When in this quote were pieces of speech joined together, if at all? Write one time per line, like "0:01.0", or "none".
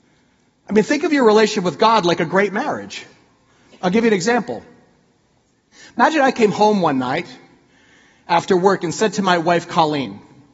none